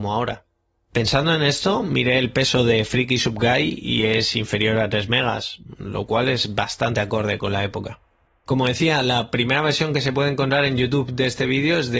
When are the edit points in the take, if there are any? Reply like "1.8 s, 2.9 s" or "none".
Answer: none